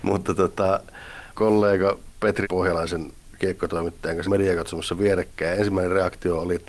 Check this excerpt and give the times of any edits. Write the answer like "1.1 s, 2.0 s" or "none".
1.4 s, 2.4 s, 4.2 s